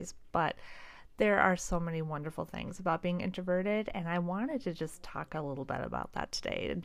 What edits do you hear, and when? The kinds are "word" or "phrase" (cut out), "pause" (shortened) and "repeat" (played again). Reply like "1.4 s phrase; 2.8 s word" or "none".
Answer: none